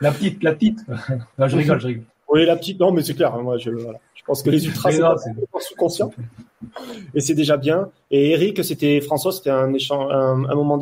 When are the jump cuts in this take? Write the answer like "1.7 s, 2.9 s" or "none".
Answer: none

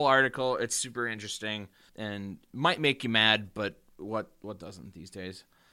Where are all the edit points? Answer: 1.9 s

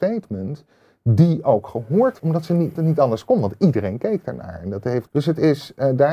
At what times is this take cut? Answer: 2.2 s, 2.8 s, 5.1 s

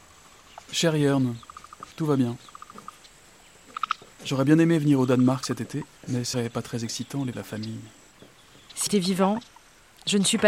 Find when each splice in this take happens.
1.9 s, 6.0 s, 6.3 s, 7.3 s, 8.9 s

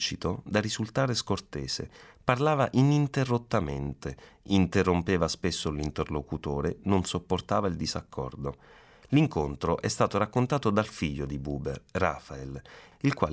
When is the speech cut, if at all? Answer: none

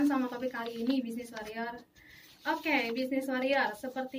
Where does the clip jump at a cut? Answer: none

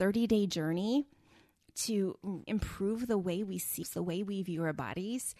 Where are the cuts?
2.5 s, 3.8 s

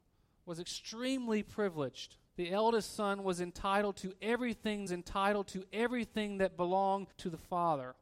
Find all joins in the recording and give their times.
2.2 s, 4.9 s, 7.1 s

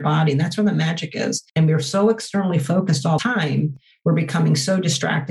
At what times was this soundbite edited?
1.5 s, 3.2 s

